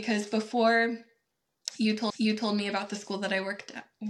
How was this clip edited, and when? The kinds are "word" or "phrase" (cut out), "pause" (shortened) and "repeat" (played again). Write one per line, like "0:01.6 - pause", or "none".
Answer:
0:02.1 - repeat